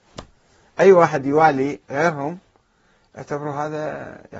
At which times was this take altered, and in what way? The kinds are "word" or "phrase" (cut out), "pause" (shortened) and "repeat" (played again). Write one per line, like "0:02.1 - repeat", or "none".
0:01.8 - word